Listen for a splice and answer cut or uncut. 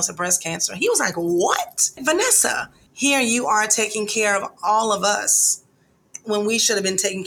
uncut